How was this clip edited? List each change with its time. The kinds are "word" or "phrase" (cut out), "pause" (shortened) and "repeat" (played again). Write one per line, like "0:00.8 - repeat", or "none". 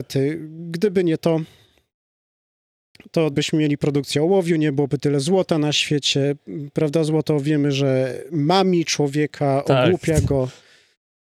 0:03.3 - word